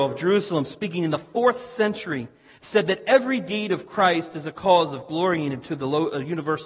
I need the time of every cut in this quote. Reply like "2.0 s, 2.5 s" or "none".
none